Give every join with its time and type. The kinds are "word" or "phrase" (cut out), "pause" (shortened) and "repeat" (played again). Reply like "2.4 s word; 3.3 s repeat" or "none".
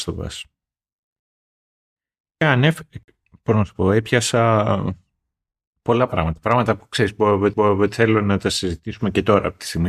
2.4 s word; 7.5 s repeat